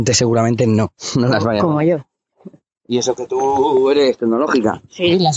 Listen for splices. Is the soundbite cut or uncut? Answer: uncut